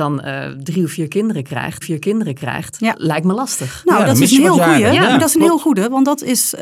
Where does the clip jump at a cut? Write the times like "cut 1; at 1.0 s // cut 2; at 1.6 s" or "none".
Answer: cut 1; at 1.8 s